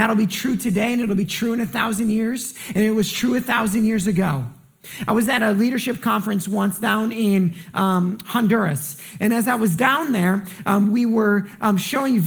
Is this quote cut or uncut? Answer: uncut